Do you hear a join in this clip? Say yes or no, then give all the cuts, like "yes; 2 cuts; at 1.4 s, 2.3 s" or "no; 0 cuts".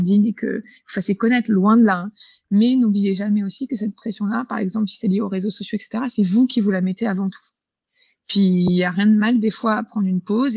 no; 0 cuts